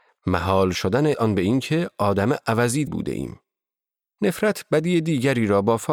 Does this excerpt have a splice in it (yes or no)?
yes